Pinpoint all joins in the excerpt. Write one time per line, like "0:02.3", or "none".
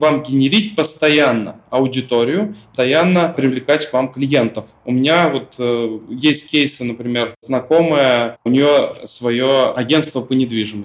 0:02.7